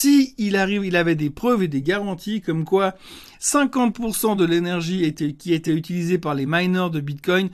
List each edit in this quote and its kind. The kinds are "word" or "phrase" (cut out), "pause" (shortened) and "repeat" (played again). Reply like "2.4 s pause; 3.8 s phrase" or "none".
none